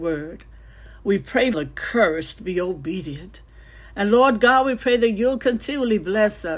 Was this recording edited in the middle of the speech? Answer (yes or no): yes